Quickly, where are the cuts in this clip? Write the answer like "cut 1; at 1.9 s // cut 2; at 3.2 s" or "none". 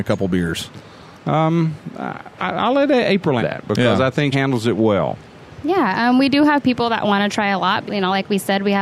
cut 1; at 3.4 s // cut 2; at 4.3 s // cut 3; at 7.9 s